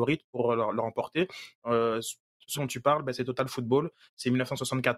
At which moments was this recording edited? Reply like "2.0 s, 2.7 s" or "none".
2.5 s